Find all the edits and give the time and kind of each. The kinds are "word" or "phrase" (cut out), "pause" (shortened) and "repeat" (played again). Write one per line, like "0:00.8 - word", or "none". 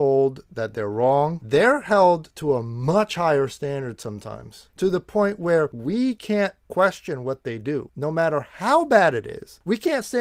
none